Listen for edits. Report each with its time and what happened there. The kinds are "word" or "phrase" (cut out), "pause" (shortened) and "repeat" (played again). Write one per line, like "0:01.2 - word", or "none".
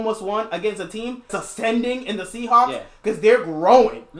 0:01.3 - word